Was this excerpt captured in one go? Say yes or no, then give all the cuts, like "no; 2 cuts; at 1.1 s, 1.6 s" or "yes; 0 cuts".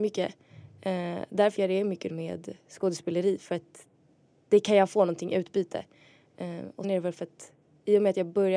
no; 3 cuts; at 1.6 s, 2.1 s, 6.8 s